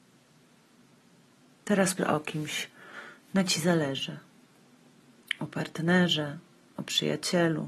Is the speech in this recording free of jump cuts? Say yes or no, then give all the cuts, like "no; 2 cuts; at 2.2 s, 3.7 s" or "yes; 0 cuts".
no; 2 cuts; at 2.0 s, 3.5 s